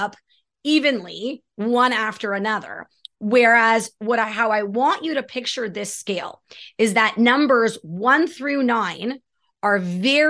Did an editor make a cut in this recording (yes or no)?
no